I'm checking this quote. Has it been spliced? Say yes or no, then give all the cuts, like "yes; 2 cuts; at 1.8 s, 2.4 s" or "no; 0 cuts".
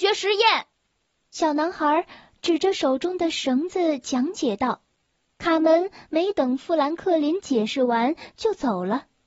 no; 0 cuts